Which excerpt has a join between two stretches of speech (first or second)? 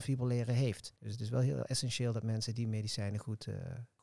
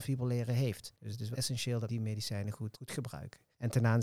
second